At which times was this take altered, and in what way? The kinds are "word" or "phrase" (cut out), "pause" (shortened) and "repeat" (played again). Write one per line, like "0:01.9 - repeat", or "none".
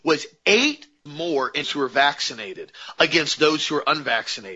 0:01.1 - word
0:01.6 - word